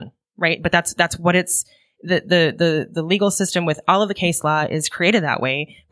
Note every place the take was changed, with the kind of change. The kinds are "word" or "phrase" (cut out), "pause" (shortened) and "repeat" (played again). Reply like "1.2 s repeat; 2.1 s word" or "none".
none